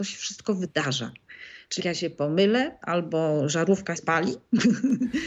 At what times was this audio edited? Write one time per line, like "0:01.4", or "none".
0:01.8
0:02.8
0:04.0